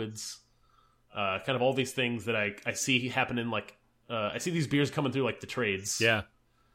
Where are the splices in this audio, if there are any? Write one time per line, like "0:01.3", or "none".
none